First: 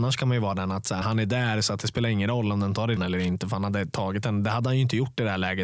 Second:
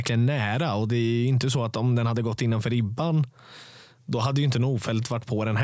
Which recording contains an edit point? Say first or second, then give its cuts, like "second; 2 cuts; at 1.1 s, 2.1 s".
first; 2 cuts; at 1.0 s, 3.0 s